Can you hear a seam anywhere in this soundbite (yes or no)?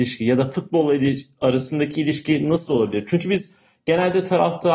no